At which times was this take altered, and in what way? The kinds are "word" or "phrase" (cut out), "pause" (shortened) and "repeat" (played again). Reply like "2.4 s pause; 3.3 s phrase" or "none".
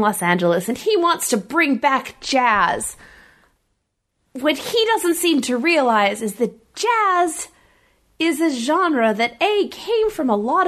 none